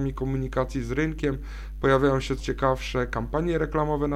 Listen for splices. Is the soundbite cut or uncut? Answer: cut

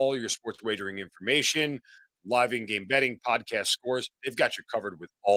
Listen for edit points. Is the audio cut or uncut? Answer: cut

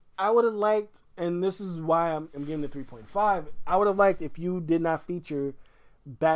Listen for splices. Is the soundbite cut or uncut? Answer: uncut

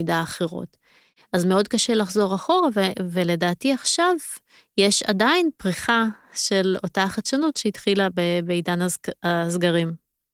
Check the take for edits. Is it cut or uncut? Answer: uncut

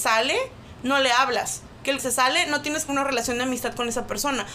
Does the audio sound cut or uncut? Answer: cut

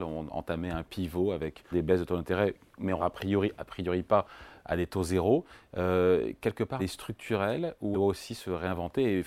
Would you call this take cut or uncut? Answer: cut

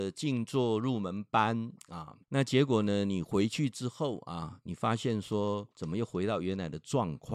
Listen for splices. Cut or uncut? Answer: cut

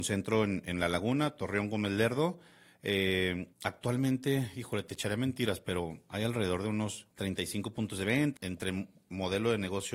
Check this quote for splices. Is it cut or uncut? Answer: cut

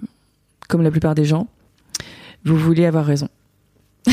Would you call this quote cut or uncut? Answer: uncut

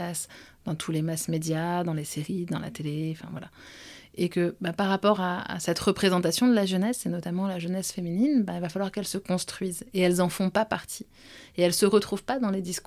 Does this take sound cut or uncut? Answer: uncut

